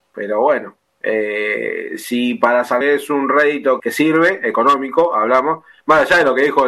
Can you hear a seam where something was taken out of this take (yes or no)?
yes